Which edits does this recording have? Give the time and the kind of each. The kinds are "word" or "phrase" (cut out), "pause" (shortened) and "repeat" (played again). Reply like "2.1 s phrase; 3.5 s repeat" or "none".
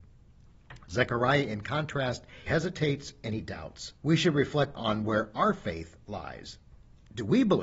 2.5 s word; 4.0 s pause; 4.7 s word